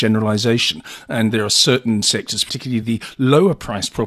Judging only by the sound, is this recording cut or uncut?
uncut